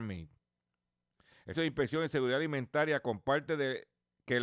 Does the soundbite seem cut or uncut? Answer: cut